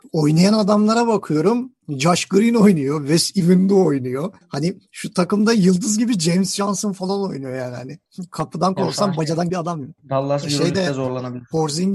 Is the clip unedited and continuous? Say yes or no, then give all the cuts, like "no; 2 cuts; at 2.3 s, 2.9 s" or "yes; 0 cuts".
no; 1 cut; at 9.5 s